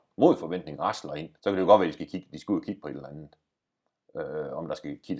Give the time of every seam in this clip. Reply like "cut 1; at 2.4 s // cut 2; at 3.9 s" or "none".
cut 1; at 1.4 s